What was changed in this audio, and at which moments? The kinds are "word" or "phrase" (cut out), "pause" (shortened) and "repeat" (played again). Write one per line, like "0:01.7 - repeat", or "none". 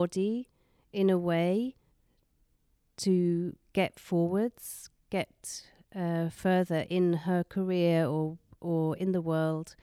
none